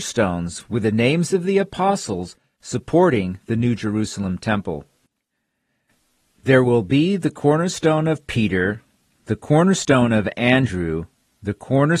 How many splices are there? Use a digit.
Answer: 0